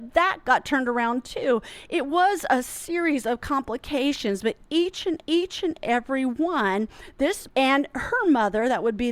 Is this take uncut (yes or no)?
no